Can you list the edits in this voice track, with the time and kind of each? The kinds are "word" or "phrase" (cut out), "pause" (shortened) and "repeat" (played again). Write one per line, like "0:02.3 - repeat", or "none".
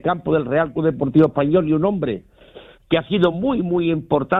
none